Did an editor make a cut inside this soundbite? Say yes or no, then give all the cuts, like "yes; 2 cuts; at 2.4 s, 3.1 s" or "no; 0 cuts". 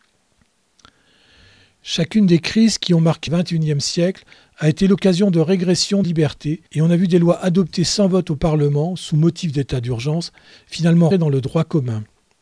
yes; 4 cuts; at 3.3 s, 6.0 s, 6.7 s, 11.1 s